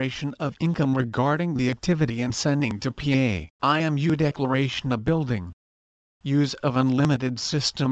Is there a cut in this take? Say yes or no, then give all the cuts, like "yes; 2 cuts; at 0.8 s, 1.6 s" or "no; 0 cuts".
yes; 1 cut; at 3.5 s